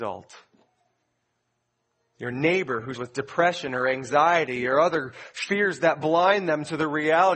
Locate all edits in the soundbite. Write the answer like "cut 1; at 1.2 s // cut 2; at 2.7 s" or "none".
cut 1; at 2.9 s